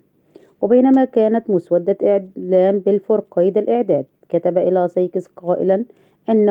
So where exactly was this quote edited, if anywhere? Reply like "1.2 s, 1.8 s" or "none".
none